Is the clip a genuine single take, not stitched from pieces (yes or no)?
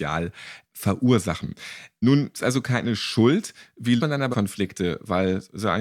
no